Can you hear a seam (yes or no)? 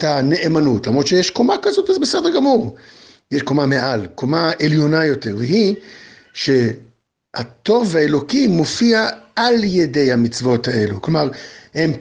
no